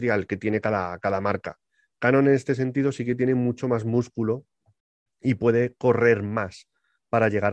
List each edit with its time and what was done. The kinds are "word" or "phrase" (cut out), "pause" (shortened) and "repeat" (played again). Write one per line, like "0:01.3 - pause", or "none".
none

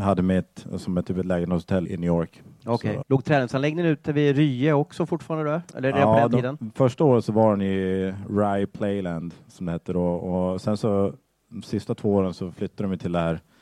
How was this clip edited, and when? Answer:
0:01.9 - word
0:03.0 - word

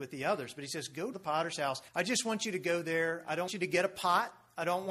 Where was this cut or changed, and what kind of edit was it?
0:01.1 - phrase
0:01.9 - pause
0:03.5 - word

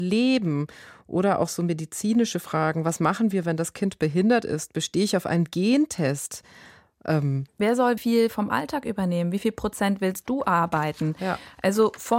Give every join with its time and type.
0:07.5 - word
0:08.0 - word

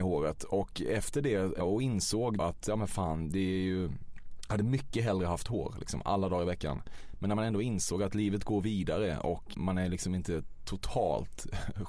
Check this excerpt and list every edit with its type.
0:01.6 - word
0:02.4 - word
0:09.5 - word

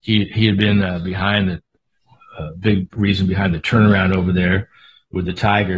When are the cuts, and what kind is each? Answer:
none

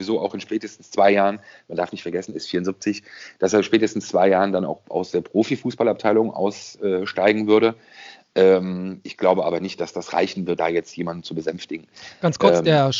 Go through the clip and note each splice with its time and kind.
0:10.6 - word

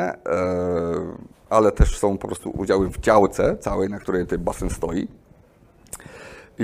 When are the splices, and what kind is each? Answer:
0:01.3 - pause

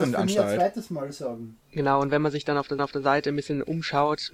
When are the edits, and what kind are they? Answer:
0:01.6 - pause
0:02.8 - repeat

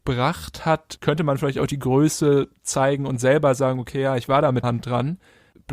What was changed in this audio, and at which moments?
0:04.6 - word

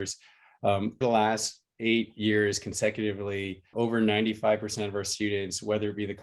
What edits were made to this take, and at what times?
0:01.0 - word
0:03.7 - word

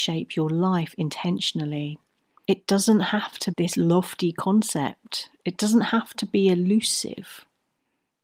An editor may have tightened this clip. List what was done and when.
0:03.5 - word

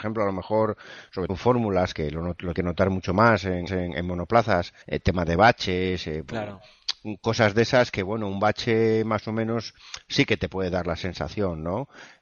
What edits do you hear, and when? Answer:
0:01.3 - word
0:01.9 - word
0:02.5 - word
0:03.7 - repeat
0:04.8 - pause

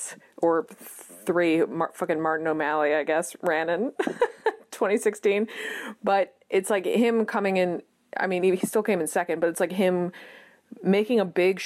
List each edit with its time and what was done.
none

